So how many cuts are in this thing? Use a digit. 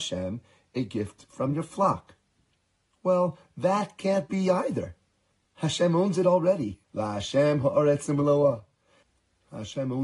1